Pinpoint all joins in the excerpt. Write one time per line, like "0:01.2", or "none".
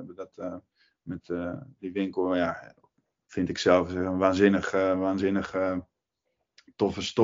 none